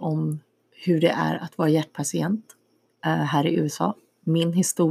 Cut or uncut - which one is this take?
uncut